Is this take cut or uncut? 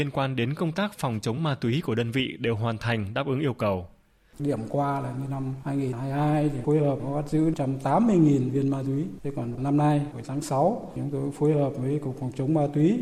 uncut